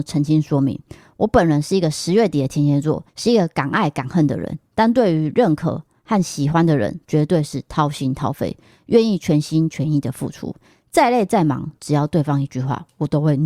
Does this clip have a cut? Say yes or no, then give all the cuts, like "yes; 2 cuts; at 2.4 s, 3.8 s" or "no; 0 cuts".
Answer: yes; 1 cut; at 3.1 s